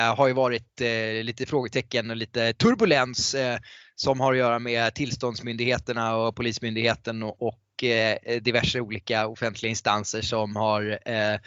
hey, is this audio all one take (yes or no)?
yes